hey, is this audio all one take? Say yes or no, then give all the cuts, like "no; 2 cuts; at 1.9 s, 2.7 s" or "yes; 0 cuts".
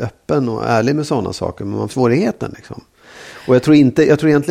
no; 1 cut; at 1.9 s